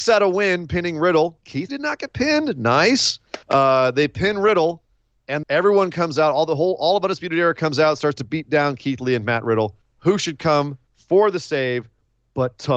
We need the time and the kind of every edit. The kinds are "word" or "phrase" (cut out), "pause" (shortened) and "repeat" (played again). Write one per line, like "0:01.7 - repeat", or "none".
0:01.7 - word
0:03.4 - pause
0:05.4 - word
0:09.8 - pause
0:10.9 - pause